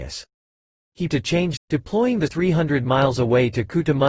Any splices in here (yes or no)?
yes